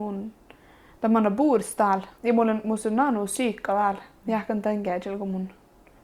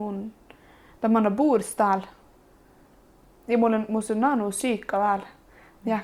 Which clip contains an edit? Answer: first; 2 cuts; at 2.2 s, 4.2 s

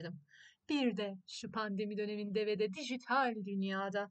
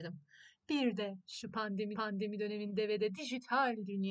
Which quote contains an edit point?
second; 1 cut; at 1.9 s

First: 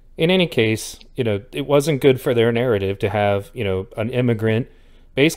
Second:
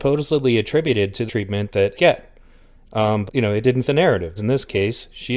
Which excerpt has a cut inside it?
second; 5 cuts; at 1.3 s, 1.9 s, 3.3 s, 3.8 s, 4.4 s

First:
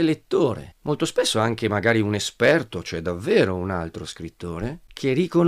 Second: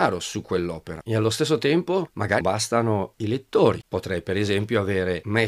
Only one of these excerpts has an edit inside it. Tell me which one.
second; 1 cut; at 2.4 s

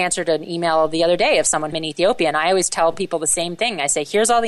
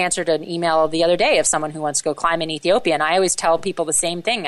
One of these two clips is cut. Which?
first; 1 cut; at 1.7 s

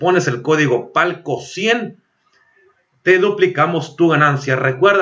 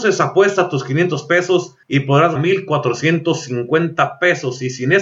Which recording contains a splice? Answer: second; 2 cuts; at 1.8 s, 2.4 s

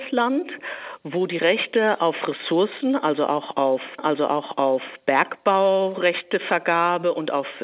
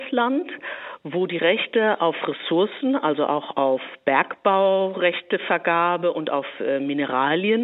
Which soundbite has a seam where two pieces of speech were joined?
first; 1 cut; at 4.0 s

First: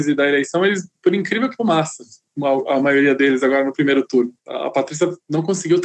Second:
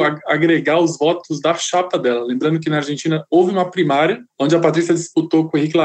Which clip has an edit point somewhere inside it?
first; 2 cuts; at 1.6 s, 4.4 s

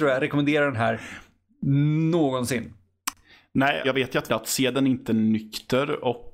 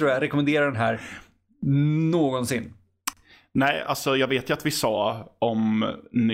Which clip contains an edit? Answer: first; 2 cuts; at 3.8 s, 4.3 s

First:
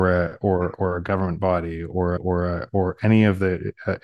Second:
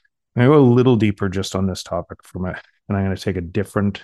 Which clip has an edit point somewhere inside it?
first; 1 cut; at 2.2 s

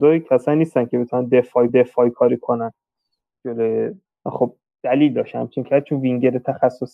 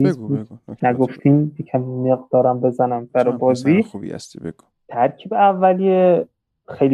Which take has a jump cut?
first; 3 cuts; at 1.7 s, 4.1 s, 5.6 s

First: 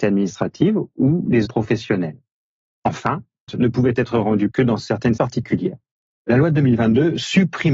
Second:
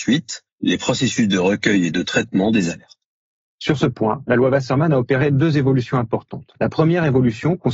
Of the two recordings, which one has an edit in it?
first; 4 cuts; at 1.4 s, 3.5 s, 4.5 s, 5.2 s

